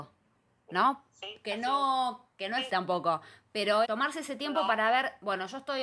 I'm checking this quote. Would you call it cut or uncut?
cut